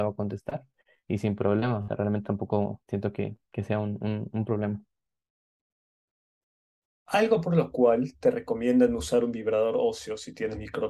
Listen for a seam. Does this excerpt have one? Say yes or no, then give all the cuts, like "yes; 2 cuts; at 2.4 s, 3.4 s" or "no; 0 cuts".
yes; 1 cut; at 2.8 s